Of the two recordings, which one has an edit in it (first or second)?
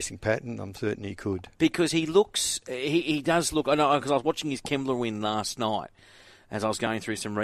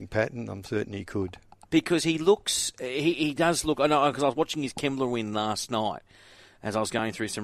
first